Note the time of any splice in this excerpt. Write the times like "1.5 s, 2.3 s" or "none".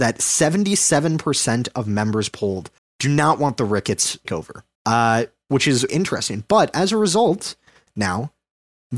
2.8 s, 4.2 s, 4.7 s, 5.9 s